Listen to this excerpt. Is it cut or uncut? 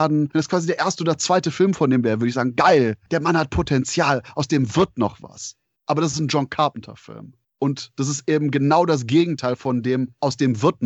uncut